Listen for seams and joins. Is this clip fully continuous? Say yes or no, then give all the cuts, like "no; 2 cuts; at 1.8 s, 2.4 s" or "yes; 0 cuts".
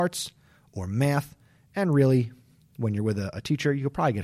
yes; 0 cuts